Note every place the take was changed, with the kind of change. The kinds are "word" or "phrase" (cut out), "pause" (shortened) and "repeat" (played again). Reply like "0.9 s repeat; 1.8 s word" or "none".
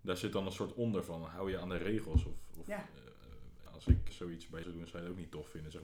3.7 s word; 4.1 s word; 4.6 s word